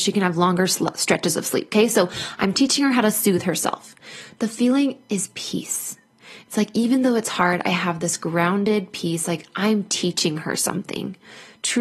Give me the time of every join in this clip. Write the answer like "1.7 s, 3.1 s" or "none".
none